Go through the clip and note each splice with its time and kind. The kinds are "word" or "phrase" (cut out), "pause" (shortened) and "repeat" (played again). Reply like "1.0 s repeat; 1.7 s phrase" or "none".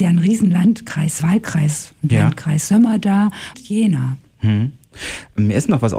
1.2 s word; 3.5 s phrase